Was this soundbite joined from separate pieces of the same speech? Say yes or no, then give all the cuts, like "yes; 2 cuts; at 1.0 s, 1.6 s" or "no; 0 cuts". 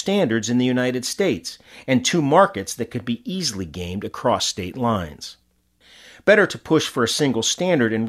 no; 0 cuts